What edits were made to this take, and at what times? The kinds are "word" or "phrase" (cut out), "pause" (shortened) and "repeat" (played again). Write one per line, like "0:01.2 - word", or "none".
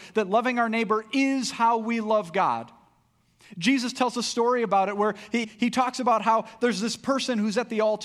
0:05.4 - word